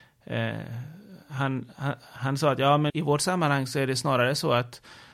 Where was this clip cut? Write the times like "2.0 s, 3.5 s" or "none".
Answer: 2.9 s